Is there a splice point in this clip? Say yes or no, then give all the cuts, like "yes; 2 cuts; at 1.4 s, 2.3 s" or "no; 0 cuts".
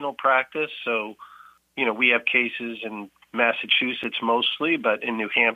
no; 0 cuts